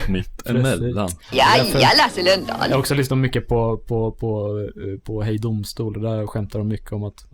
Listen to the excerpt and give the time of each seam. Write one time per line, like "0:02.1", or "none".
none